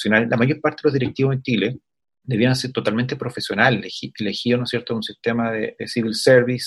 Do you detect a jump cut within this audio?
yes; 1 cut; at 2.0 s

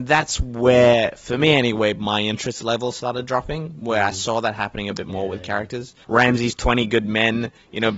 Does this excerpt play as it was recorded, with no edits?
no; 1 cut; at 6.0 s

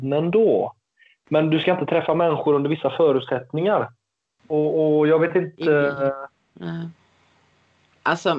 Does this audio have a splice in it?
no; 0 cuts

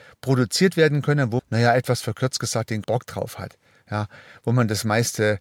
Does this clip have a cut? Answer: yes; 2 cuts; at 1.4 s, 2.8 s

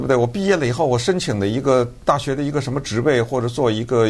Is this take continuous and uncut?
yes; 0 cuts

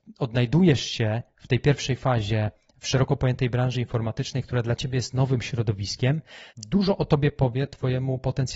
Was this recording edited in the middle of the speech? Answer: yes; 1 cut; at 6.5 s

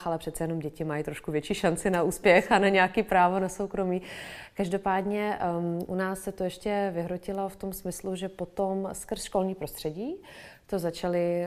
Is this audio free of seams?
yes; 0 cuts

